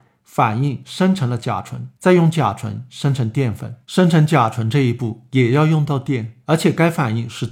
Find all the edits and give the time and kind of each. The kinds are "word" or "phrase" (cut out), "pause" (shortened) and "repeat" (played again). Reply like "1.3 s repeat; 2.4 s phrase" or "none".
1.9 s pause; 3.8 s pause; 6.4 s pause